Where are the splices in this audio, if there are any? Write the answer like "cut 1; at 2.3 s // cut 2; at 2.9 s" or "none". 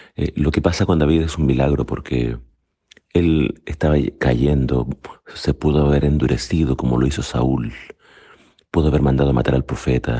none